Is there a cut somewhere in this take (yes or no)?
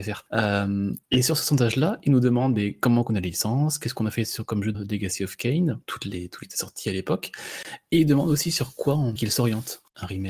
yes